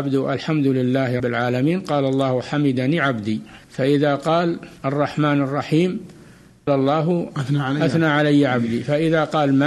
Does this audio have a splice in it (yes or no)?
yes